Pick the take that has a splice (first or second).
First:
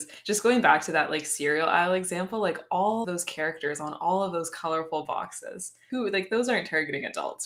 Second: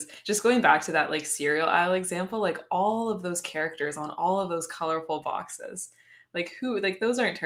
first